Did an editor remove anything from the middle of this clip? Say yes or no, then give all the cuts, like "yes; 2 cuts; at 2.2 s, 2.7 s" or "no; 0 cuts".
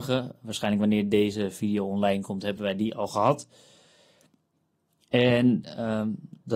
no; 0 cuts